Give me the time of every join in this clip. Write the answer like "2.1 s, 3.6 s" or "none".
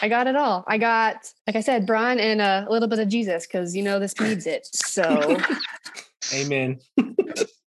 1.4 s, 1.9 s, 4.2 s